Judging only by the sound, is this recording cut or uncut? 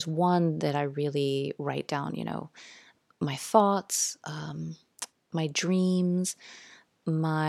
uncut